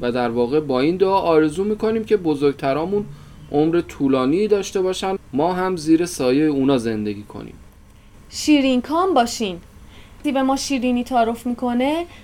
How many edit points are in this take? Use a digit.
2